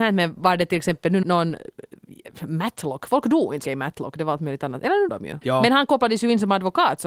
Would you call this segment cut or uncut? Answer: cut